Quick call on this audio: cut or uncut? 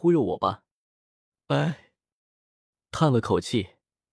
uncut